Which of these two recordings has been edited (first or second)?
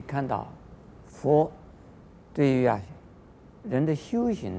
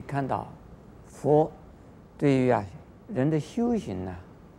second